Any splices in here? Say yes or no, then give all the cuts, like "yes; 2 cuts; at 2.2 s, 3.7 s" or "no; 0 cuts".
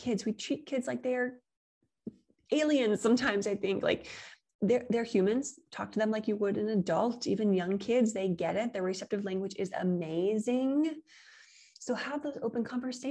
no; 0 cuts